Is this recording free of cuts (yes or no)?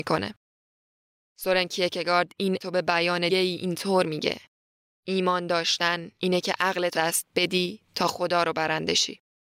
no